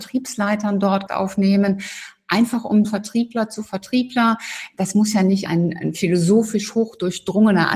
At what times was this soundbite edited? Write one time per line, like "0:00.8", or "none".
0:01.1
0:02.8
0:05.5